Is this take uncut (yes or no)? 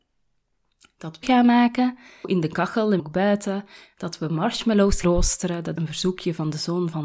no